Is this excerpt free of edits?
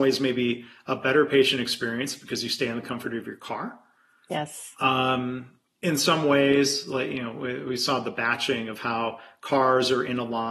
yes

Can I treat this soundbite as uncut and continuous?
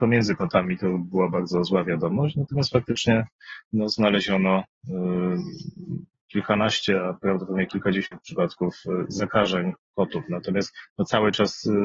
yes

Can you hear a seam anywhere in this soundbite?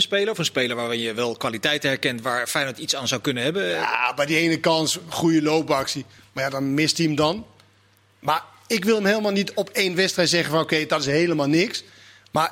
no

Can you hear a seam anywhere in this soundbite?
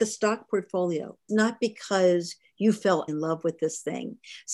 yes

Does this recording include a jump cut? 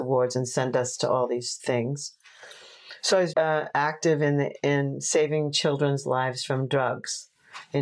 yes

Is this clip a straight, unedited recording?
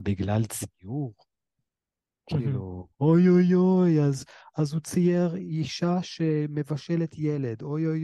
no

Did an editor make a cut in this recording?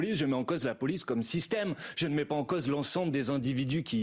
no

